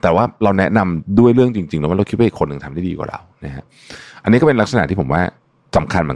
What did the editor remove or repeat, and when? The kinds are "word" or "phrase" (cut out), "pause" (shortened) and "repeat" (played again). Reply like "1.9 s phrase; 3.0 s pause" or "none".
none